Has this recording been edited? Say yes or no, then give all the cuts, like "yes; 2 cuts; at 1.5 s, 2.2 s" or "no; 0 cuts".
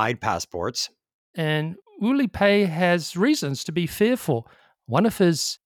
no; 0 cuts